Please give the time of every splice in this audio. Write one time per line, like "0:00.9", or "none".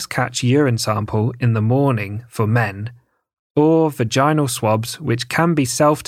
none